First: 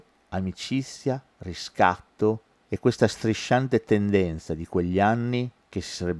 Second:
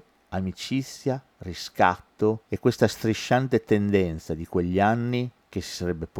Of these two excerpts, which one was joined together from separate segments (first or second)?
second